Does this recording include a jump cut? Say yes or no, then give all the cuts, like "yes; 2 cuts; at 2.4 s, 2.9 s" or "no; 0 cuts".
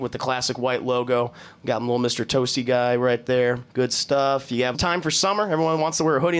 yes; 2 cuts; at 3.7 s, 4.7 s